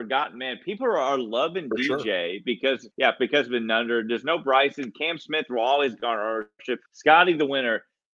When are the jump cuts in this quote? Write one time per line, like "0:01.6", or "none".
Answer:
0:02.9
0:06.9